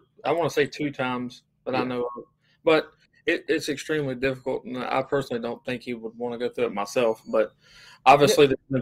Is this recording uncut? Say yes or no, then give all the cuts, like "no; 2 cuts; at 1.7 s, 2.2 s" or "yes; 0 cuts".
yes; 0 cuts